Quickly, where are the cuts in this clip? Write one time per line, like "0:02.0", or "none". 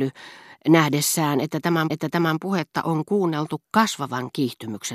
0:01.9